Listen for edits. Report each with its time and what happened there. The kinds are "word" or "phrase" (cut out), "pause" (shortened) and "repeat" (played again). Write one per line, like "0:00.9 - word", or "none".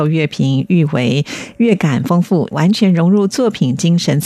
0:02.5 - phrase